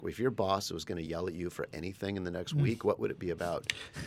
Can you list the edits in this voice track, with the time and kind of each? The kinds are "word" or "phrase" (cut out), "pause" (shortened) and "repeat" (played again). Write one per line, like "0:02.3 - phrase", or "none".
none